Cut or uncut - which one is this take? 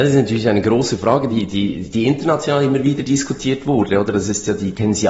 uncut